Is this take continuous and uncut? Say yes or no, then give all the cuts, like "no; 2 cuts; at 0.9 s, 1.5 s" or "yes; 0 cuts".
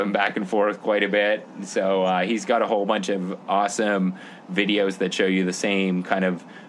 yes; 0 cuts